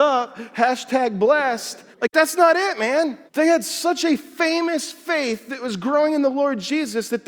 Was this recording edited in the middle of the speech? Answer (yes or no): yes